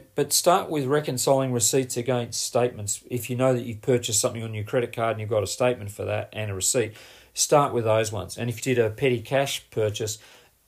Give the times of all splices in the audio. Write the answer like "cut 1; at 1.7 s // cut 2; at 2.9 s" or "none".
cut 1; at 8.6 s

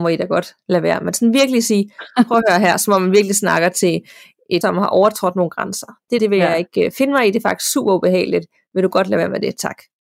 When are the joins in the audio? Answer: cut 1; at 4.6 s // cut 2; at 6.2 s

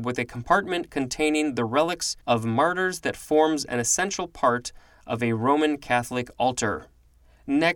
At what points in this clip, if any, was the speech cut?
cut 1; at 2.2 s

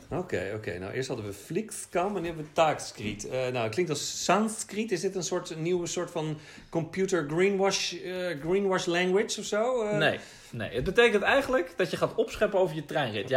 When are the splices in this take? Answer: none

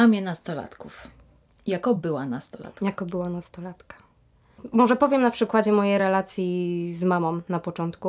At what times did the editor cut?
none

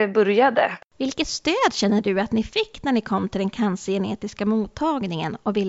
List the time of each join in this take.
none

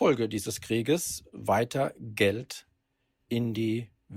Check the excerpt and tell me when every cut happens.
cut 1; at 1.3 s

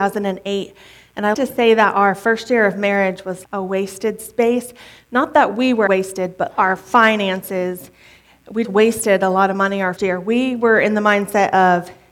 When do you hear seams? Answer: cut 1; at 1.3 s // cut 2; at 3.4 s // cut 3; at 5.9 s // cut 4; at 6.5 s // cut 5; at 8.6 s // cut 6; at 10.0 s

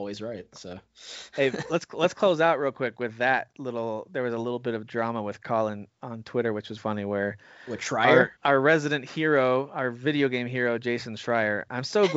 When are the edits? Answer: cut 1; at 6.8 s // cut 2; at 8.4 s

